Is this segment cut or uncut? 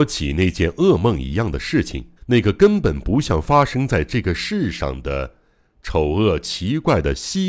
cut